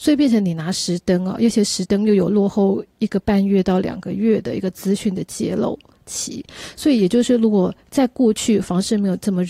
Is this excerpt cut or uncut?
uncut